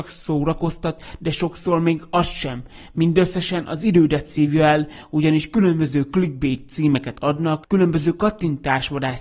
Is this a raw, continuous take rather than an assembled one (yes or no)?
yes